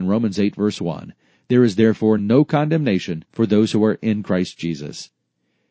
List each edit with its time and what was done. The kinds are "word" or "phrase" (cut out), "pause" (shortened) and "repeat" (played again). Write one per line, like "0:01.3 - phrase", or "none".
0:02.2 - word
0:03.3 - pause